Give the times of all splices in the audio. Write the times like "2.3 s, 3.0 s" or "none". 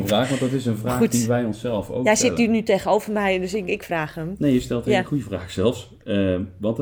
3.7 s